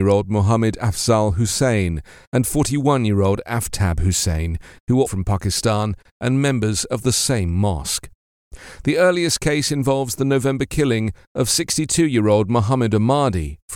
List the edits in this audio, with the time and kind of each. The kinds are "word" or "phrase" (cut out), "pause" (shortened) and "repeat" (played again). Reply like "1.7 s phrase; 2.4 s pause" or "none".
5.1 s word